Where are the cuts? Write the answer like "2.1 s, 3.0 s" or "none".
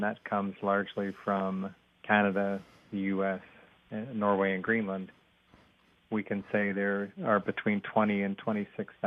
none